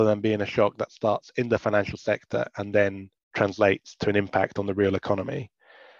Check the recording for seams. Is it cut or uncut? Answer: cut